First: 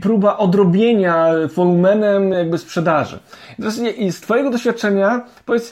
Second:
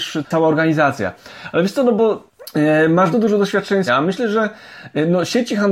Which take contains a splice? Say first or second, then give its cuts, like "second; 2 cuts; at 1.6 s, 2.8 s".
second; 2 cuts; at 3.1 s, 3.9 s